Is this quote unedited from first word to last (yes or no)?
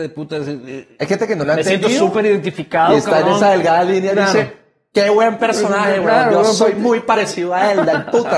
yes